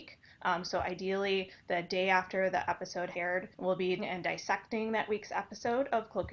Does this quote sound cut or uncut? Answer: cut